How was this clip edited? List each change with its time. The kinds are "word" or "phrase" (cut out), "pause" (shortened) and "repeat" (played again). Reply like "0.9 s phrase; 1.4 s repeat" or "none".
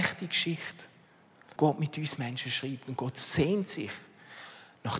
1.6 s word